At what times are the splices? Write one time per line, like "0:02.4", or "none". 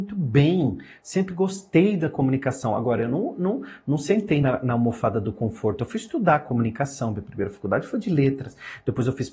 none